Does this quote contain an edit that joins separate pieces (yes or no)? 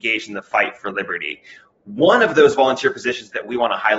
no